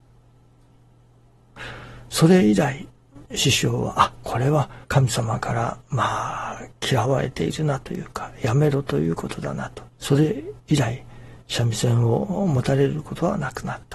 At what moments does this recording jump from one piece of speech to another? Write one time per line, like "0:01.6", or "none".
0:03.3
0:04.8
0:09.9